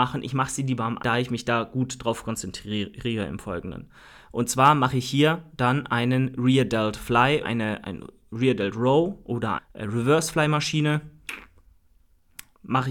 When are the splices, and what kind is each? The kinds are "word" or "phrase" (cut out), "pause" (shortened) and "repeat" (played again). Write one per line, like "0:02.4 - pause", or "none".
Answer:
0:01.0 - word
0:07.4 - word
0:07.8 - word
0:09.6 - word